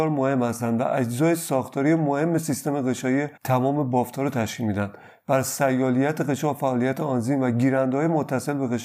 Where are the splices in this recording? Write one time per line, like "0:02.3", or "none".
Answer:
0:03.4